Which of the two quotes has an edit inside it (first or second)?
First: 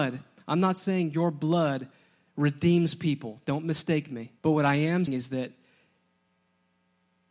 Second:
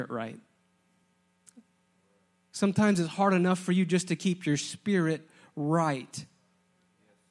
first